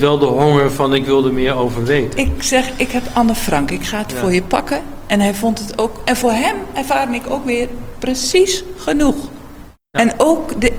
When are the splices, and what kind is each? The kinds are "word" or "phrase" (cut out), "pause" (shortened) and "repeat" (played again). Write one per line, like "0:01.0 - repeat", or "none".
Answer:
0:09.9 - pause